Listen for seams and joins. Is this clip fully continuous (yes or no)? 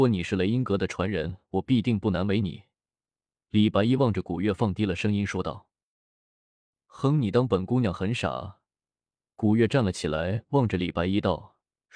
yes